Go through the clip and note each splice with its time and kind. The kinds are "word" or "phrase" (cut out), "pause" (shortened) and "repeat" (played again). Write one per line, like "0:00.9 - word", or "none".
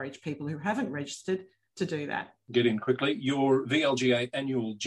none